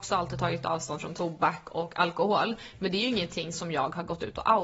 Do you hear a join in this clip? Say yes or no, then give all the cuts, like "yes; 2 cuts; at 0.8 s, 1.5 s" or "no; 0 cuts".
no; 0 cuts